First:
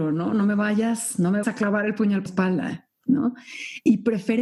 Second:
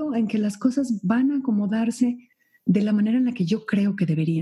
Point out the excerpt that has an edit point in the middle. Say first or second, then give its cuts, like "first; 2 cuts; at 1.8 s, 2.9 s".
first; 2 cuts; at 1.4 s, 2.3 s